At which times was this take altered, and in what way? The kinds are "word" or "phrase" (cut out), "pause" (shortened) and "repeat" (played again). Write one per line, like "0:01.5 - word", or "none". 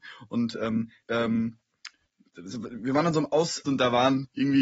0:01.0 - word
0:03.7 - word